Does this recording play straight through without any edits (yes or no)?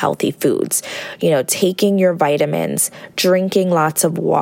yes